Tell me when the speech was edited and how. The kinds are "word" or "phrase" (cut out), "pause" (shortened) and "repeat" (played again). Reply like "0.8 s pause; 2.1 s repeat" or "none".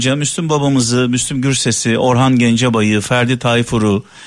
none